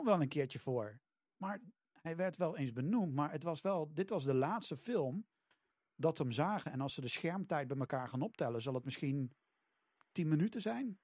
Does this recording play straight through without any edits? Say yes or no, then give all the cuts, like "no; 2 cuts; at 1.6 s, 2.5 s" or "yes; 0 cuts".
yes; 0 cuts